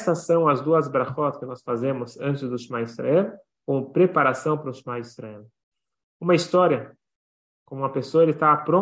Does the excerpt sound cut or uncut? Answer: uncut